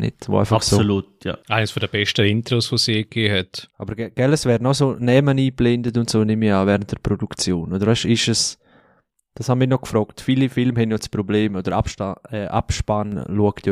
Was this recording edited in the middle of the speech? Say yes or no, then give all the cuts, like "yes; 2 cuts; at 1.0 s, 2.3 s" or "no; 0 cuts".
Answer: no; 0 cuts